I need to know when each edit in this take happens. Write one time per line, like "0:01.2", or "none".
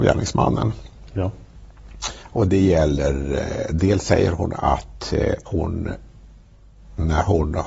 0:02.2
0:05.5